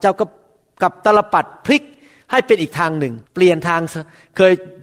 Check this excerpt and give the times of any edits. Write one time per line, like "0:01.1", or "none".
0:03.3